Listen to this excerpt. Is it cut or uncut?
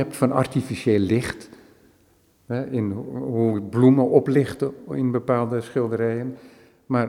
uncut